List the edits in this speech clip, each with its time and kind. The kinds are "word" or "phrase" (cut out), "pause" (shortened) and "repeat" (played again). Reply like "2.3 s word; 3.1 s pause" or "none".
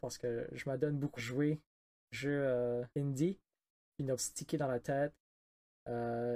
1.2 s word; 2.1 s word; 2.9 s pause; 4.2 s phrase